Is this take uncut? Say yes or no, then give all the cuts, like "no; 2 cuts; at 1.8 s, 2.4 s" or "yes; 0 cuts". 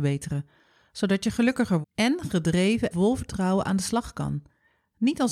no; 2 cuts; at 1.8 s, 2.9 s